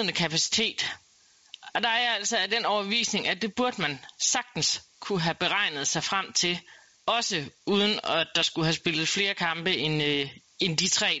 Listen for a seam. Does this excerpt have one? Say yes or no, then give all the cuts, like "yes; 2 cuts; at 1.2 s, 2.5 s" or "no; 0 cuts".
yes; 1 cut; at 7.0 s